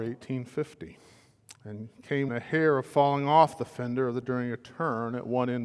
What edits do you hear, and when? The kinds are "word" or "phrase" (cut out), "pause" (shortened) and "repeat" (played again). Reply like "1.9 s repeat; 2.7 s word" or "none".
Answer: 2.3 s word; 4.2 s word